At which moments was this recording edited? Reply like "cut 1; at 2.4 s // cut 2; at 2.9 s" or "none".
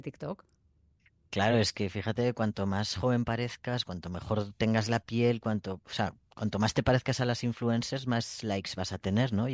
none